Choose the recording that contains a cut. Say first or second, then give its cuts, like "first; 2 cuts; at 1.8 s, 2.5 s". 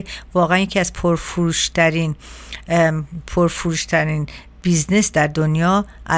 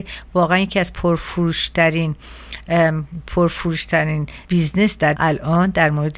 second; 2 cuts; at 4.4 s, 5.1 s